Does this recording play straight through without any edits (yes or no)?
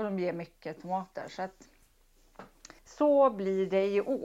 no